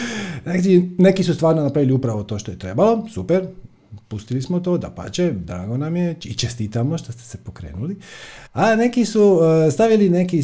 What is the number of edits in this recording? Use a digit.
1